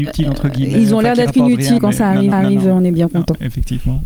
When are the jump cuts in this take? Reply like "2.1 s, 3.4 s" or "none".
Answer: 1.8 s, 2.3 s

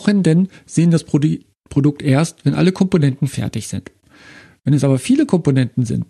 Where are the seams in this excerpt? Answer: none

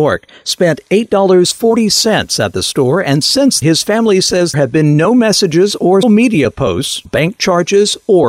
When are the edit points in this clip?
3.6 s, 4.5 s, 6.0 s, 7.1 s

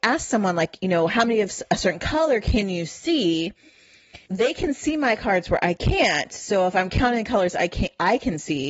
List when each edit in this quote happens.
4.3 s

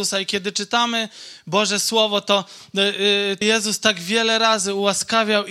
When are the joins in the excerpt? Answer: 3.4 s

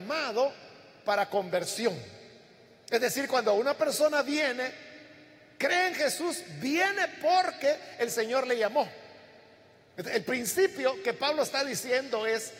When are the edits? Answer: none

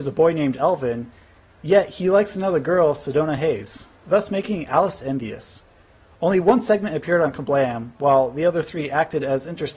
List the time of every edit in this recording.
none

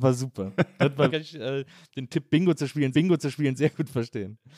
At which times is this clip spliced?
1.1 s, 2.9 s

